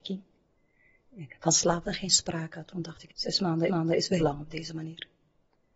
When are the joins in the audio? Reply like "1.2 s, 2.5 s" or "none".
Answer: 1.9 s, 3.1 s, 3.7 s, 4.2 s